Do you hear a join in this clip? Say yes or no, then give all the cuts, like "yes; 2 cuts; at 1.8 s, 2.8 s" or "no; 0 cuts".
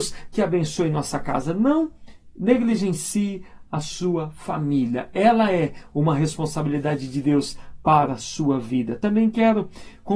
no; 0 cuts